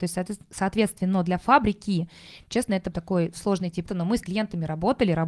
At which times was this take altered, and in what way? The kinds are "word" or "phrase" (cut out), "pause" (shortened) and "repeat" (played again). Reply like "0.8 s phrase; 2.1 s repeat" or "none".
2.9 s word; 3.9 s word; 4.2 s word